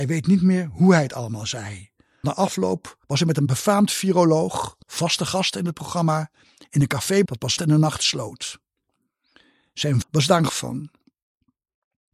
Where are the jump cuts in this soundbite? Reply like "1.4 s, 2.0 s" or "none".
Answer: 2.2 s, 3.0 s, 4.8 s, 7.2 s, 7.6 s, 10.0 s, 10.5 s